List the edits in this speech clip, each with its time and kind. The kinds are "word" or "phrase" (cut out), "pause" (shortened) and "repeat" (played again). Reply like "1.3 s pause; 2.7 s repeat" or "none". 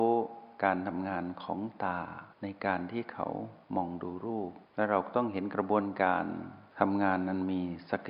2.3 s pause; 3.6 s pause; 4.7 s pause

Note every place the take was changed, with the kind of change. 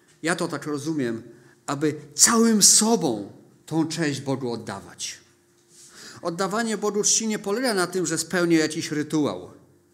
none

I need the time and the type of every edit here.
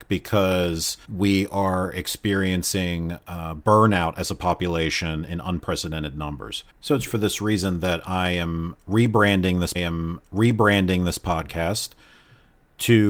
1.0 s pause; 6.7 s pause; 7.1 s word; 9.7 s repeat

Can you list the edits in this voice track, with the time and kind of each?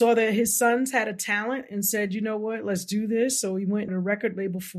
3.9 s word

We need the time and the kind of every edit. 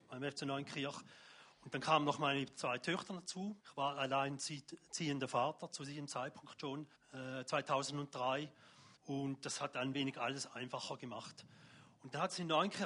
3.6 s pause; 6.9 s pause; 9.0 s pause

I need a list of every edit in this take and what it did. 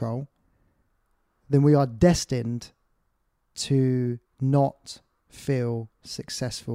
4.2 s pause

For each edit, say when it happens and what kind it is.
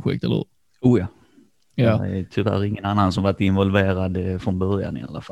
none

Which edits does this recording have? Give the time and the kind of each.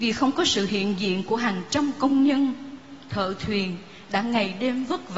none

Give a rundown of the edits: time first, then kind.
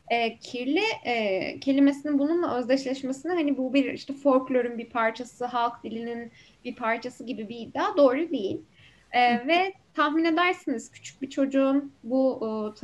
none

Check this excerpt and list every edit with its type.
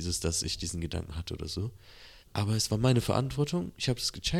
2.2 s pause

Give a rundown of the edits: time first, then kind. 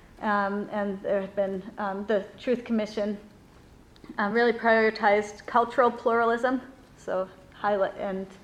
none

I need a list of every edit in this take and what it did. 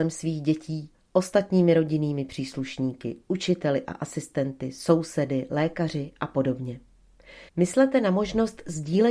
0.9 s pause; 7.5 s pause

